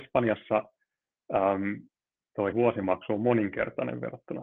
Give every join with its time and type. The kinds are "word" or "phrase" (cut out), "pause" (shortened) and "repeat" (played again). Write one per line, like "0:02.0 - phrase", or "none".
0:02.5 - word